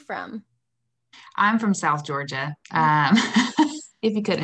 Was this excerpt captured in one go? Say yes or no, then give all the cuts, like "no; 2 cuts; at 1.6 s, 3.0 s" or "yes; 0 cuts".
no; 1 cut; at 2.6 s